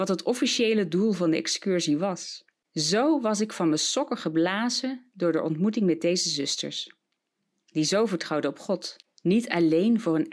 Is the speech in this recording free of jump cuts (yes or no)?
yes